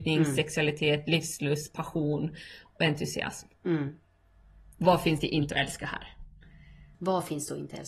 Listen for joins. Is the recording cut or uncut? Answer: uncut